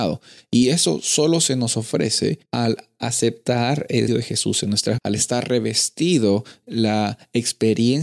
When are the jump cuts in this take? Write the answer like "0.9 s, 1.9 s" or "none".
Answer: 2.5 s, 4.1 s, 5.0 s, 6.6 s